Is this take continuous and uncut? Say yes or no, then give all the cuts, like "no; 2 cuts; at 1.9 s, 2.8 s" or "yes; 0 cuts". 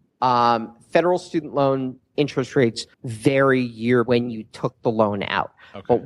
no; 2 cuts; at 2.9 s, 4.1 s